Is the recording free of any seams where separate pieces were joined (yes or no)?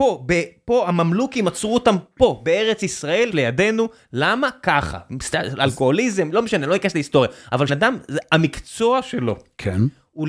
no